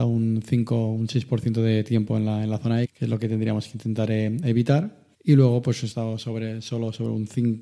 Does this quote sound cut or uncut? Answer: cut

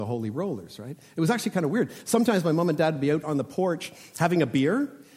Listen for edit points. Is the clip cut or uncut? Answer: uncut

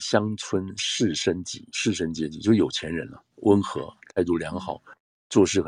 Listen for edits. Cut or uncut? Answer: cut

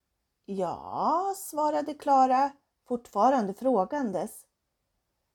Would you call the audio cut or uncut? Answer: uncut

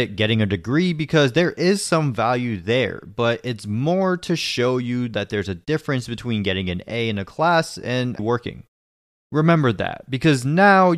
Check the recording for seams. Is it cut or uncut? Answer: cut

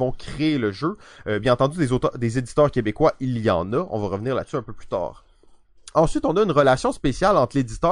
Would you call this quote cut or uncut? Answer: uncut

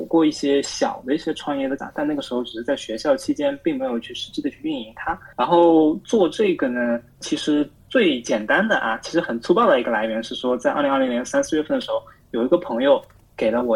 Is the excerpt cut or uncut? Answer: cut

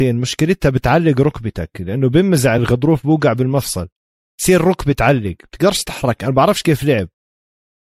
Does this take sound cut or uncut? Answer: uncut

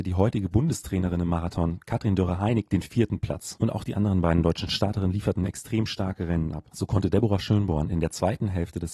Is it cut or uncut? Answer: uncut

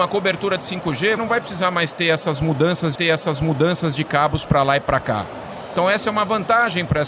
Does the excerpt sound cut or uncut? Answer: cut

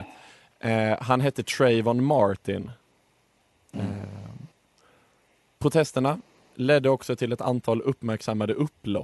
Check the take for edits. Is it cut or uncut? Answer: uncut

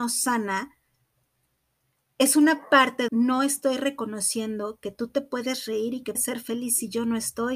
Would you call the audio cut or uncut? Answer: cut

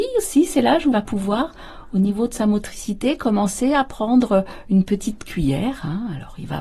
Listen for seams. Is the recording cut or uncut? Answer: cut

